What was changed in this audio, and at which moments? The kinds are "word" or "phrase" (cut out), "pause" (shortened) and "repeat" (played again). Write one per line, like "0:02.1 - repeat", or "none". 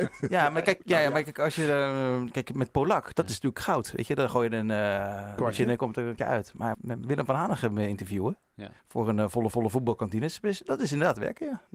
0:05.4 - word
0:06.2 - word
0:06.7 - word
0:08.8 - pause
0:09.5 - repeat